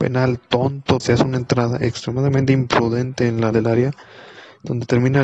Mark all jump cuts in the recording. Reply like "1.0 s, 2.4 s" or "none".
1.0 s, 3.5 s